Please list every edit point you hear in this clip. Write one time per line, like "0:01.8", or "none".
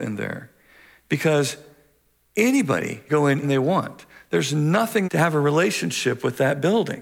0:03.1
0:03.4
0:05.0

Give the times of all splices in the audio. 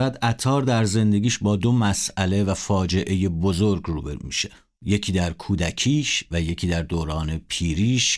none

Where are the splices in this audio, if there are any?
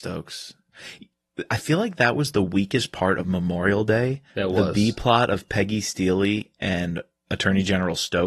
0:04.3

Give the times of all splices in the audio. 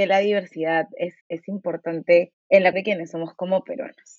0:01.2
0:02.4
0:02.7

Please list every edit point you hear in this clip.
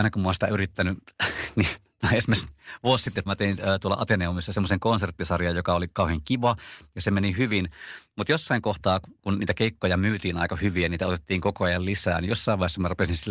0:03.3

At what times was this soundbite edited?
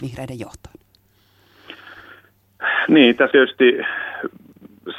0:03.3

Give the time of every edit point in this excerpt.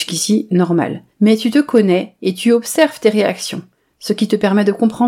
0:01.1

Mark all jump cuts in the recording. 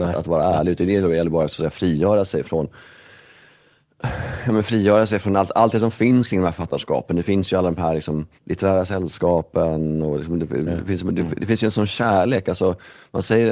0:08.3
0:11.4

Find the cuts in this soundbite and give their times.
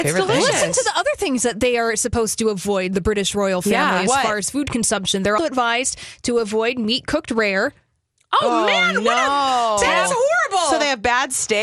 0:05.4

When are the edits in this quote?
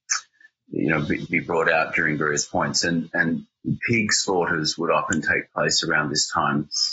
0:01.3

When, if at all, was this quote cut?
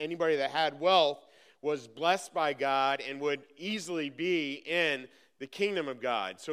none

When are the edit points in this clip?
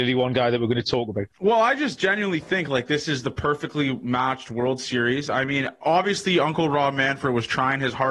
0:01.3

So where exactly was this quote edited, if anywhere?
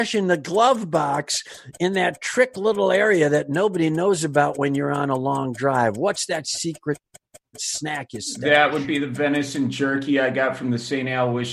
none

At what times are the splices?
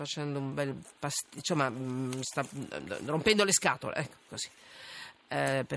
0:04.3

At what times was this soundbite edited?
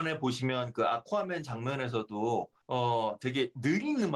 0:02.6

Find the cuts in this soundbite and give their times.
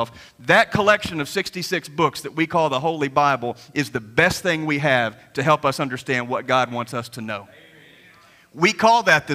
none

